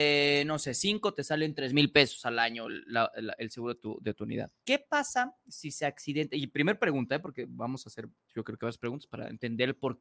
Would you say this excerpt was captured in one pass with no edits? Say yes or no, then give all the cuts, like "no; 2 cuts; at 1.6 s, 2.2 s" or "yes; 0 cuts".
yes; 0 cuts